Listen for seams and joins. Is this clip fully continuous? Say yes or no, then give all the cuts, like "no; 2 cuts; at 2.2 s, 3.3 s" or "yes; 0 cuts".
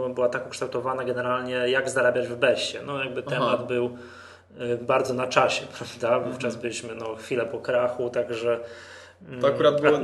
yes; 0 cuts